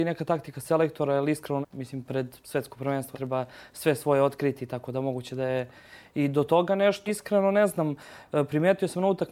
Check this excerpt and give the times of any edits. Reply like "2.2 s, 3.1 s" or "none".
1.6 s, 2.4 s, 3.1 s, 7.1 s

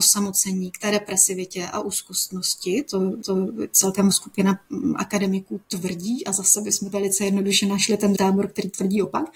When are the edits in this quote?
3.2 s, 4.1 s, 5.6 s, 6.9 s, 8.1 s

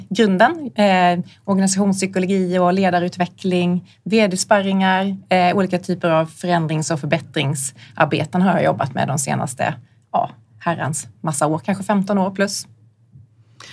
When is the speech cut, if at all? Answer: none

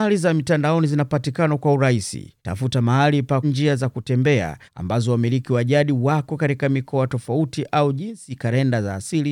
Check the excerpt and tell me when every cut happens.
2.4 s, 3.4 s, 4.6 s

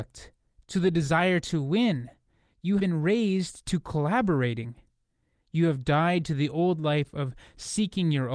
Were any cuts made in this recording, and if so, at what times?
2.8 s

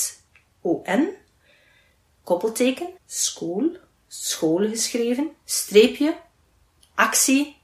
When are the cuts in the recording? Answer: 3.0 s, 5.4 s

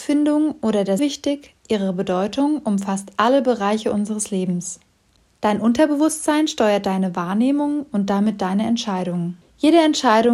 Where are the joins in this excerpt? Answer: 1.0 s

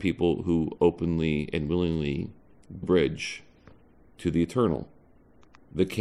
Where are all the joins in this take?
2.8 s

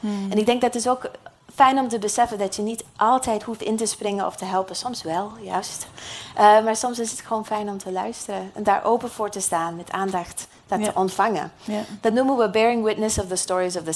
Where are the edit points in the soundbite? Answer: none

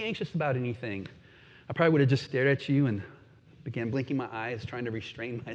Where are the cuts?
none

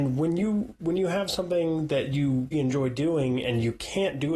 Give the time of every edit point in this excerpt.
2.5 s

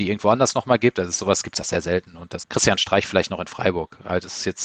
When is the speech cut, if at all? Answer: 1.6 s, 2.4 s

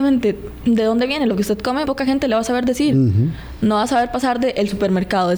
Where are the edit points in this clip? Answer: 1.8 s

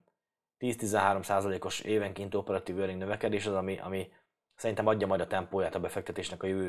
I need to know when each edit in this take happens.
none

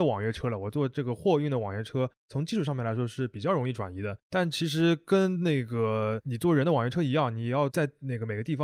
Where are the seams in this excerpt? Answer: 4.2 s

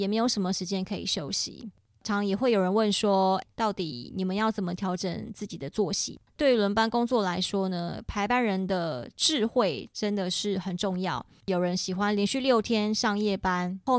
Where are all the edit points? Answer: 3.4 s

